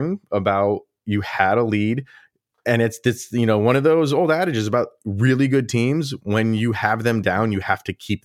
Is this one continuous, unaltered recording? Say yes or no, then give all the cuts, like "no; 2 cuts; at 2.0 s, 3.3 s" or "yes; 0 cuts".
yes; 0 cuts